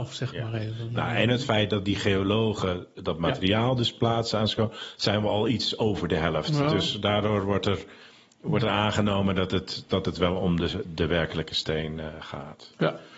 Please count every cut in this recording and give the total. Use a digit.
0